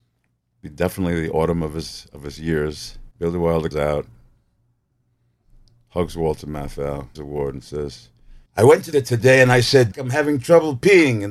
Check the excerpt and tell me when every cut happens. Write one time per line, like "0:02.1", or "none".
0:03.1
0:03.7
0:07.2
0:08.5
0:08.9
0:09.9